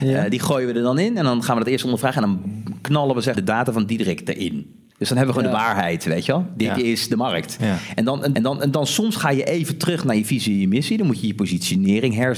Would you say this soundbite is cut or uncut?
cut